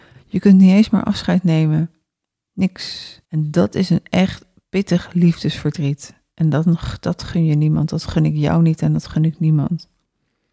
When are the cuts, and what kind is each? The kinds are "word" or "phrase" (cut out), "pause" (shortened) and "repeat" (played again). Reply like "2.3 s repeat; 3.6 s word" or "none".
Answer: 3.2 s pause